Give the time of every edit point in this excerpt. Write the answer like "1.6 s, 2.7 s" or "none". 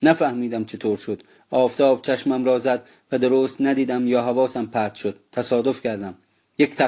none